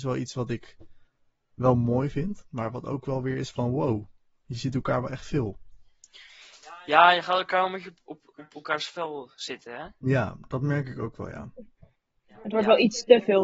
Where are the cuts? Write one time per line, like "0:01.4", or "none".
none